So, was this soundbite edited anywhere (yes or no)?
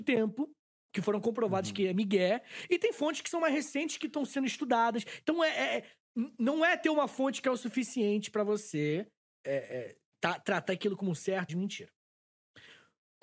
yes